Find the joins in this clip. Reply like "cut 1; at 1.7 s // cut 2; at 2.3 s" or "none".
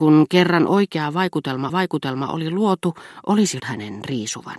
cut 1; at 1.7 s // cut 2; at 3.6 s